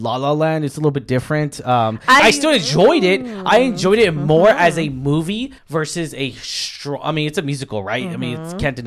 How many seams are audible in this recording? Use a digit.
2